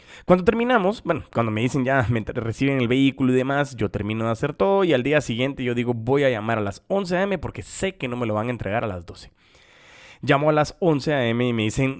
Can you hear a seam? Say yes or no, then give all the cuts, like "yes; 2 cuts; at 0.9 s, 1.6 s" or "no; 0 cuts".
no; 0 cuts